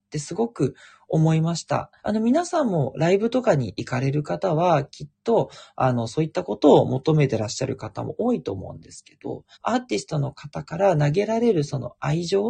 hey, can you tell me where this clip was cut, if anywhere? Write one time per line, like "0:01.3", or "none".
0:02.0
0:09.5